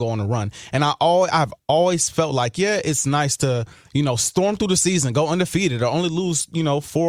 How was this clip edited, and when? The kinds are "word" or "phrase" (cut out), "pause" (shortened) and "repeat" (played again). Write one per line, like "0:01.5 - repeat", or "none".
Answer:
none